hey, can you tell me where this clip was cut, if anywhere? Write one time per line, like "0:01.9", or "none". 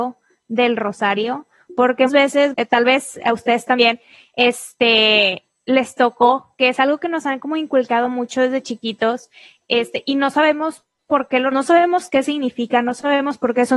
0:02.1
0:02.5
0:11.5